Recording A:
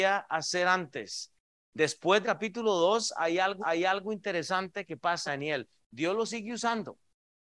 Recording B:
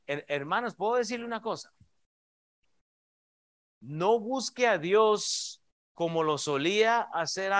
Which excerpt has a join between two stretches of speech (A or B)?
A